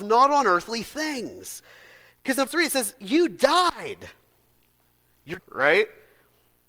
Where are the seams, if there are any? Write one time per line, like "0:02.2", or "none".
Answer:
0:02.5
0:05.4